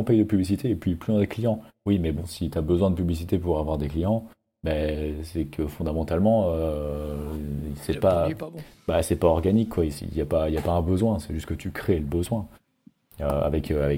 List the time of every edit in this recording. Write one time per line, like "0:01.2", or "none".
none